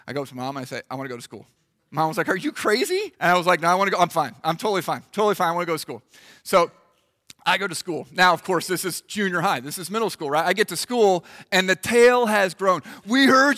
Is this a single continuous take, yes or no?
no